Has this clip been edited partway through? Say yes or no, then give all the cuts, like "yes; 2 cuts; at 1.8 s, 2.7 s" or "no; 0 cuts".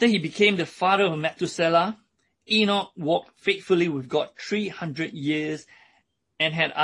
no; 0 cuts